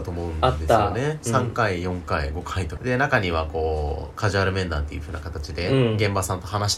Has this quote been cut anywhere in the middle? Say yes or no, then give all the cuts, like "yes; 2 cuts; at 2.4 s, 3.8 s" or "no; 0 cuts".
yes; 1 cut; at 2.8 s